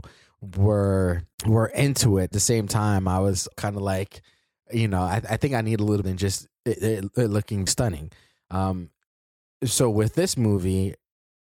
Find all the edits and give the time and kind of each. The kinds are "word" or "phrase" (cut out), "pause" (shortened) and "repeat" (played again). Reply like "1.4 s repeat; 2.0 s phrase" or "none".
1.3 s pause; 2.3 s phrase; 3.5 s word; 6.0 s phrase; 7.7 s word